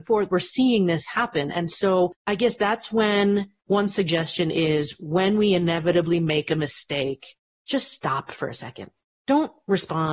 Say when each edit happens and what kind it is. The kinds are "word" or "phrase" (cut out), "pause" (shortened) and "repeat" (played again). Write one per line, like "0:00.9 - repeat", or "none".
0:02.2 - pause